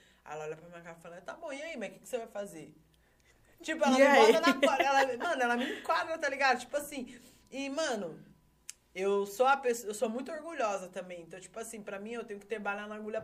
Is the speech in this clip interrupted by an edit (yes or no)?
no